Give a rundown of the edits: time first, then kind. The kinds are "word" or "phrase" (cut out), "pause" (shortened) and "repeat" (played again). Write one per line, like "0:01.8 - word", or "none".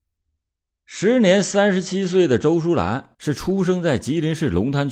0:03.1 - pause